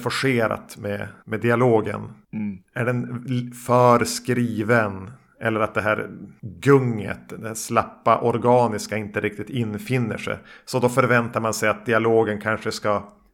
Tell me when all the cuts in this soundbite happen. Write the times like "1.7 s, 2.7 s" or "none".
1.2 s